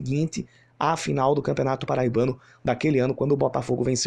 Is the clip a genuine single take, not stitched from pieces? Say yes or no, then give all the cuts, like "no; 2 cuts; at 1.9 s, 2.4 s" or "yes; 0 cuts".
yes; 0 cuts